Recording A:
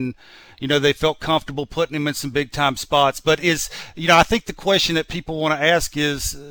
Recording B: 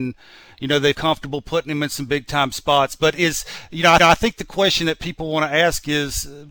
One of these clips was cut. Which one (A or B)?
B